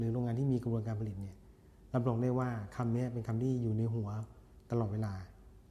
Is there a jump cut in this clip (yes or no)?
no